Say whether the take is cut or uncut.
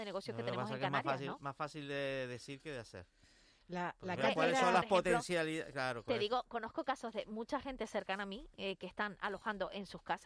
uncut